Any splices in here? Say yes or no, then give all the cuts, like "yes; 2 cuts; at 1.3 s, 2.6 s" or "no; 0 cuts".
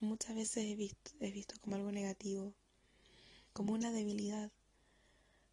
yes; 1 cut; at 3.5 s